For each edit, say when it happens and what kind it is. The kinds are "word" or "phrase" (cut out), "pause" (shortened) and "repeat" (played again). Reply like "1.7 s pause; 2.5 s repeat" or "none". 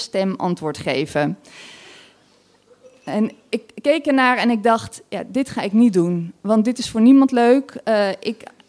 none